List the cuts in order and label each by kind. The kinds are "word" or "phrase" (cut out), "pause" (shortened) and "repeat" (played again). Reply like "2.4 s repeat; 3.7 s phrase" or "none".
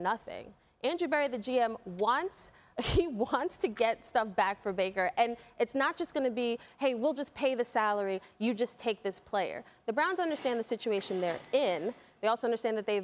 none